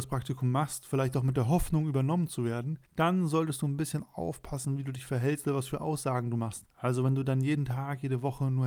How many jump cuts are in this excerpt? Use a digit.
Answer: 2